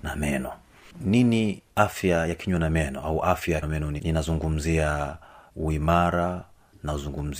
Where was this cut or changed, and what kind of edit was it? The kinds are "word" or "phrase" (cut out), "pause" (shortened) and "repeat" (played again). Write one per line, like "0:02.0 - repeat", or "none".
0:01.7 - pause
0:03.6 - word
0:04.0 - word
0:05.5 - word